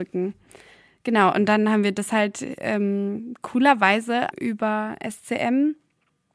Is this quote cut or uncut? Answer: cut